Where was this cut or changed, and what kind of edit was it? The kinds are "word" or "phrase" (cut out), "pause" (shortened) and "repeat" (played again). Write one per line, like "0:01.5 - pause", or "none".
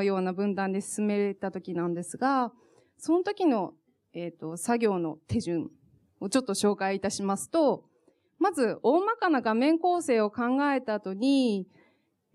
none